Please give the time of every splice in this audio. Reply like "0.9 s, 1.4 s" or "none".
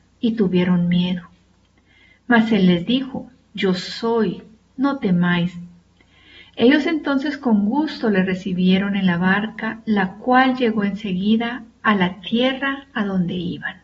none